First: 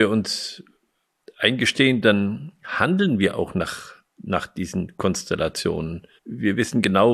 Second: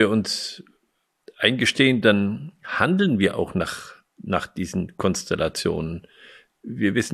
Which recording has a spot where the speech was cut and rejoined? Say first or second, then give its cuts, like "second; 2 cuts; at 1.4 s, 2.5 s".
first; 1 cut; at 6.2 s